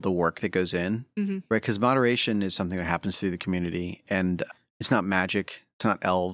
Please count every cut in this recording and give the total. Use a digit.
0